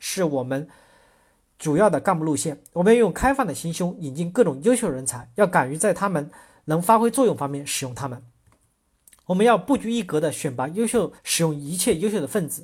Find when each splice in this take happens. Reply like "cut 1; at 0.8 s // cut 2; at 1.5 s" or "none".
cut 1; at 11.2 s